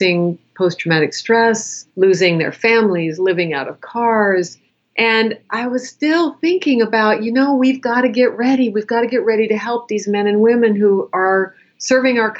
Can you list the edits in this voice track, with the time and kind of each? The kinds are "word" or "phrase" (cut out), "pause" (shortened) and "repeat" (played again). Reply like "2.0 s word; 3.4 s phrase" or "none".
1.9 s pause; 4.7 s pause